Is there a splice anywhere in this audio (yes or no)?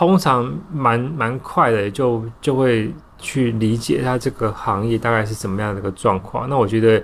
no